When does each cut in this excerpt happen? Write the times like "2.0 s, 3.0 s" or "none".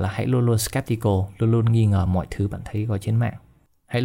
none